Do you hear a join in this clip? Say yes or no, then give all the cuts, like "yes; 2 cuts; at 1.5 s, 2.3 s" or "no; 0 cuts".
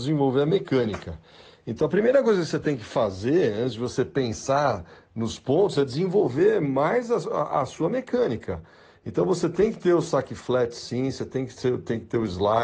no; 0 cuts